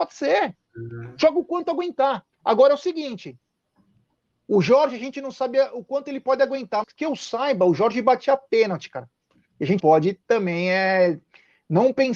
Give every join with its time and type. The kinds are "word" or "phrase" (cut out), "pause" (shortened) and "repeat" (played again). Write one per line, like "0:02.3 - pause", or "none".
0:02.3 - pause
0:06.8 - word
0:09.8 - word